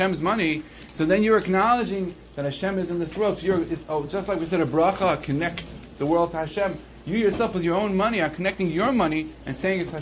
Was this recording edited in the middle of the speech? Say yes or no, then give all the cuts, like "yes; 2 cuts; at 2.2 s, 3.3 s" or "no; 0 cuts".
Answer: no; 0 cuts